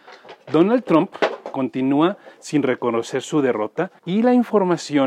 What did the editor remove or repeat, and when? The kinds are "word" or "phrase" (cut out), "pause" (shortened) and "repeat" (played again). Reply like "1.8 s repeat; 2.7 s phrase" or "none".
4.0 s pause